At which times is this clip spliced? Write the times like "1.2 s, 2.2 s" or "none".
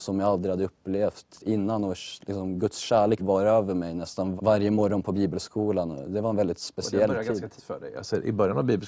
3.2 s, 4.4 s, 7.6 s